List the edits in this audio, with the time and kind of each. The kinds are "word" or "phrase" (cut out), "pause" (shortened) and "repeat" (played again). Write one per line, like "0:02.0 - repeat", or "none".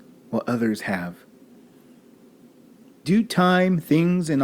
0:03.0 - word